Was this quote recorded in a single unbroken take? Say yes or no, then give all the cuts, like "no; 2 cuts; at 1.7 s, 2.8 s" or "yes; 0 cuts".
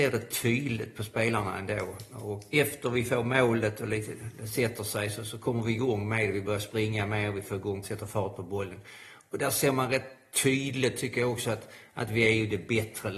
no; 2 cuts; at 2.5 s, 7.8 s